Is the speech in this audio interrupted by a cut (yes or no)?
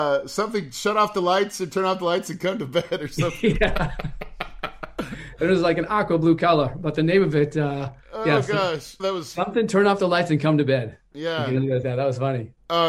yes